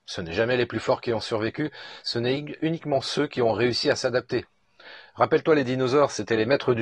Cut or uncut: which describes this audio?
uncut